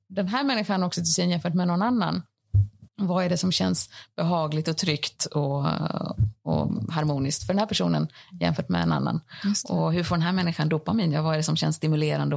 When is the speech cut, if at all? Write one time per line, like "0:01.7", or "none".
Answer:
0:02.9

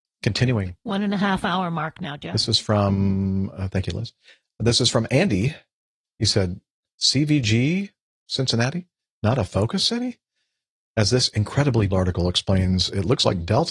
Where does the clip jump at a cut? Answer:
0:11.9

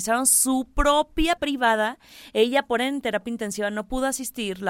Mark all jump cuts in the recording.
0:01.4
0:02.8

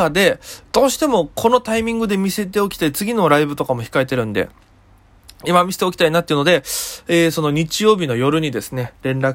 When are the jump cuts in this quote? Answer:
none

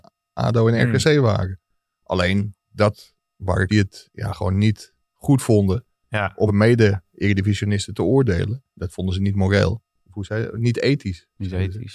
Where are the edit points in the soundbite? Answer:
0:03.7
0:06.5
0:08.7

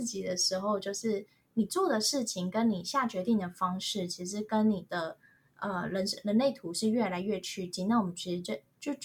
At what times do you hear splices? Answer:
none

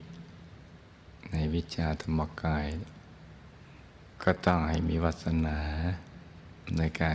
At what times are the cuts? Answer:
0:04.1

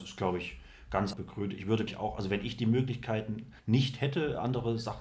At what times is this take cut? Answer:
0:01.1
0:01.9
0:03.6

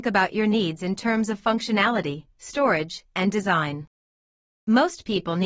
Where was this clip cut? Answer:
none

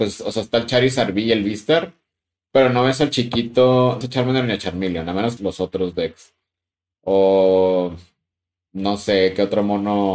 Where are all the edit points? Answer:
0:04.0
0:05.4

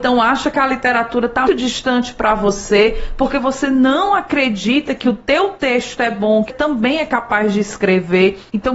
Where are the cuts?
0:01.5
0:06.5

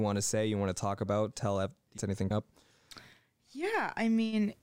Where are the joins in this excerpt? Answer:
0:02.0
0:02.3

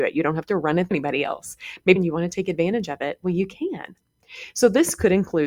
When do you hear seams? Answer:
0:00.9
0:02.0

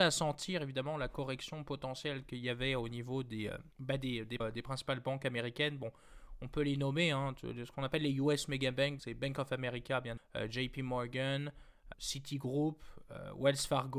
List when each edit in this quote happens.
0:03.7
0:04.4
0:09.0
0:10.2
0:11.9

